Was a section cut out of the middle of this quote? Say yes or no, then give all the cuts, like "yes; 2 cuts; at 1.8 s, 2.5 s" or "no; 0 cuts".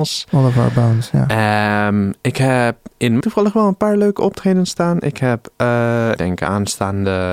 yes; 2 cuts; at 3.2 s, 6.2 s